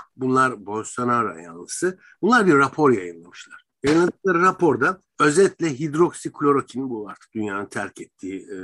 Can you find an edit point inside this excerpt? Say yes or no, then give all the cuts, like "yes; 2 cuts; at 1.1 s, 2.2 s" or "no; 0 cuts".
yes; 2 cuts; at 3.7 s, 5.1 s